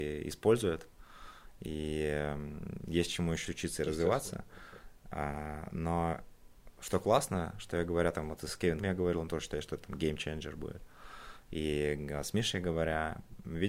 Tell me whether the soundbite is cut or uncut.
cut